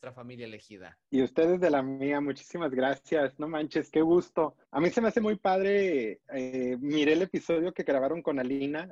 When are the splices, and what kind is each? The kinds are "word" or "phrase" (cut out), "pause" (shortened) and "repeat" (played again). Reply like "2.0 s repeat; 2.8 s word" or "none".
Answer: 1.0 s pause; 4.6 s pause; 6.2 s pause